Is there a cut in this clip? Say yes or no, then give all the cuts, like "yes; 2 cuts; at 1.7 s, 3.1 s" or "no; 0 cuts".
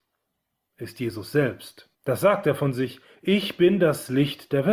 yes; 1 cut; at 1.9 s